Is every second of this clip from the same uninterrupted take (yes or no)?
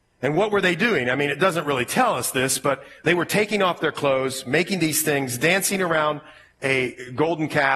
yes